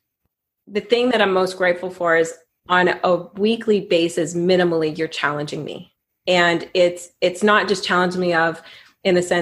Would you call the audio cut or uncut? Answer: uncut